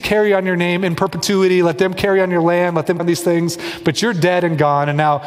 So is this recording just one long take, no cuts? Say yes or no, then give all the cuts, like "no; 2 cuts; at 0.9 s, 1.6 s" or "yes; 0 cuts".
no; 1 cut; at 3.0 s